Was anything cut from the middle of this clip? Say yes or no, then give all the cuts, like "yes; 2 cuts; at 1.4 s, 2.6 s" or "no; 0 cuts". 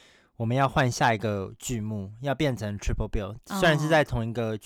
no; 0 cuts